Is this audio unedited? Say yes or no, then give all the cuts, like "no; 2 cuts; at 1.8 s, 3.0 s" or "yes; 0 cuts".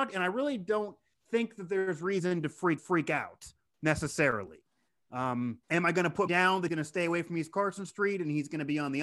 no; 5 cuts; at 1.1 s, 2.8 s, 5.6 s, 6.3 s, 6.7 s